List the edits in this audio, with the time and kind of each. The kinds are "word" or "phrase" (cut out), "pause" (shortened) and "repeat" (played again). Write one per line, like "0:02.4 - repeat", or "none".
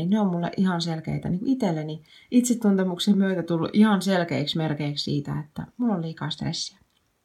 none

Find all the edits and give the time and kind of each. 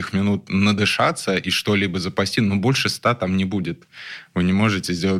none

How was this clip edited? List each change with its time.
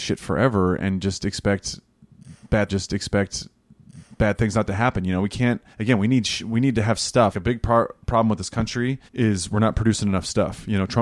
0:02.7 - repeat
0:05.7 - pause
0:07.3 - word
0:09.1 - pause

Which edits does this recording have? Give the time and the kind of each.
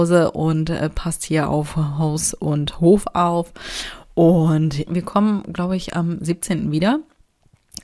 0:04.9 - phrase

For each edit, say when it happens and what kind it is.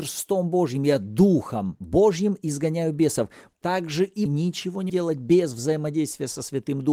0:04.3 - word
0:04.9 - word

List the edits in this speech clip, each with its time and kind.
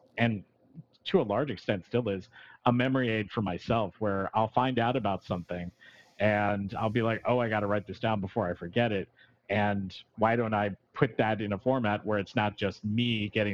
none

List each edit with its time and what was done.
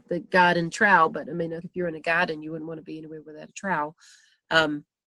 0:01.6 - word

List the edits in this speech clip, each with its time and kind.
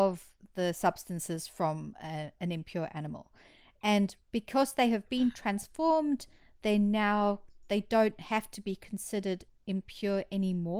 none

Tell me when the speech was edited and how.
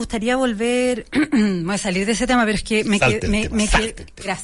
none

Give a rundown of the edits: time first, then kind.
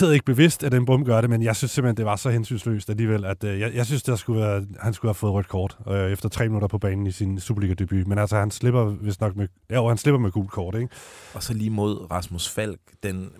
none

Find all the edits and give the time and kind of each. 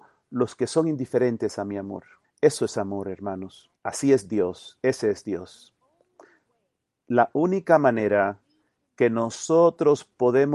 0:02.2 - pause
0:03.8 - pause

